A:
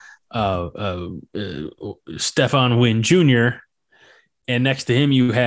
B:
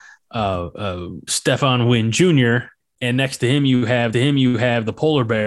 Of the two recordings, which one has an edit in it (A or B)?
B